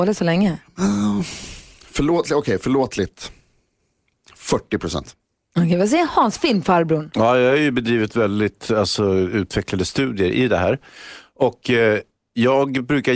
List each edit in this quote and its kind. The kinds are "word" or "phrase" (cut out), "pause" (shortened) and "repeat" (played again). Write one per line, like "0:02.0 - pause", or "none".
none